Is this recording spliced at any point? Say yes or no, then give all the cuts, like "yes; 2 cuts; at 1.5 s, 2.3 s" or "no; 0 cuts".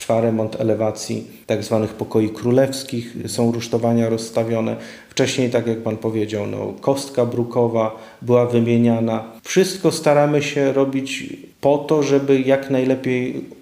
no; 0 cuts